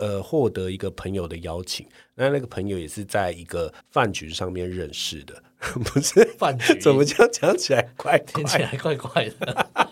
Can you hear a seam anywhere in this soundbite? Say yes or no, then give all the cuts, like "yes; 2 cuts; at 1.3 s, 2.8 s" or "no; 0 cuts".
yes; 1 cut; at 3.8 s